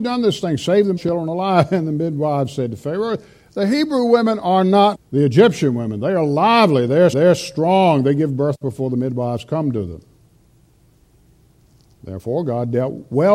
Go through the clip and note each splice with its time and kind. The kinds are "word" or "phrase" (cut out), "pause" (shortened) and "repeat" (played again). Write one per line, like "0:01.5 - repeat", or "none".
0:01.0 - word
0:04.9 - word
0:07.1 - repeat

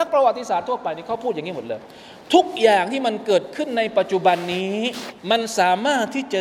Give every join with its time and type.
0:05.2 - pause

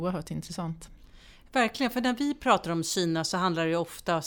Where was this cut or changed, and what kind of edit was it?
none

